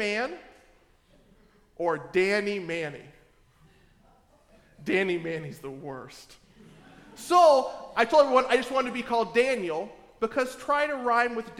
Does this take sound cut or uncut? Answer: uncut